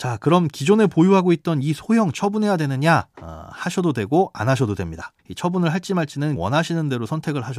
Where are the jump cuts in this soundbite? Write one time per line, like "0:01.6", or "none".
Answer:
0:02.1
0:03.1
0:05.2
0:06.4